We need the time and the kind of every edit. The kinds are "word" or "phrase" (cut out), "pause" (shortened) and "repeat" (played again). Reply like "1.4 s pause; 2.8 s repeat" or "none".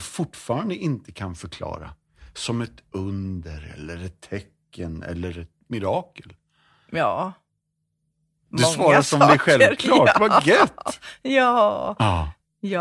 none